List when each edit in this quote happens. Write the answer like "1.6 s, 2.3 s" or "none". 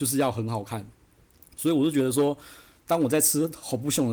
none